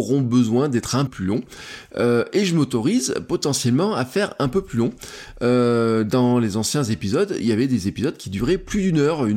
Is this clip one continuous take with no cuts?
no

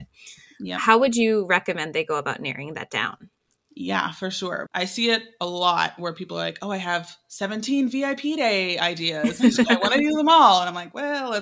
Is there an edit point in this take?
no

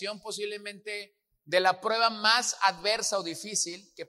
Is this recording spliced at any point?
no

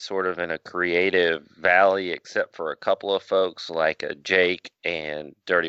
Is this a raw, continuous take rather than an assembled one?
yes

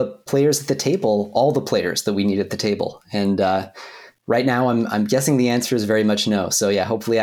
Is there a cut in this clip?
no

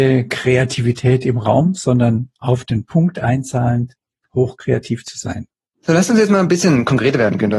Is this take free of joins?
yes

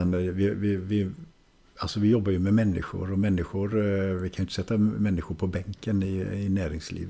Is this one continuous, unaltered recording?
yes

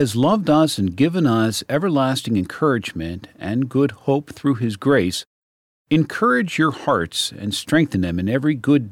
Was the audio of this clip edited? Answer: no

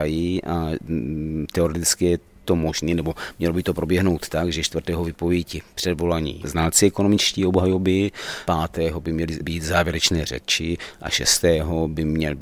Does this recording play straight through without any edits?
yes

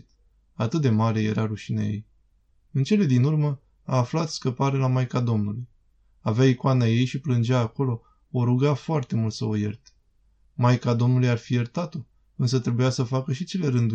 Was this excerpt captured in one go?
yes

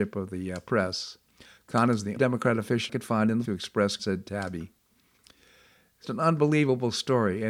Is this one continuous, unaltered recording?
no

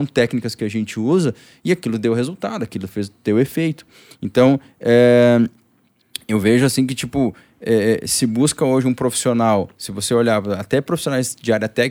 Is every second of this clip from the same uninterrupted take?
yes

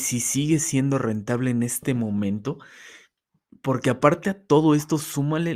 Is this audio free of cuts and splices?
no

